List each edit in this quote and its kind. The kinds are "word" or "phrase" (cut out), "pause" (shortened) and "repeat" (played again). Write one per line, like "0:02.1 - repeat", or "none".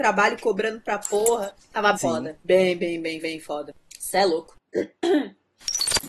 0:01.9 - word
0:03.2 - repeat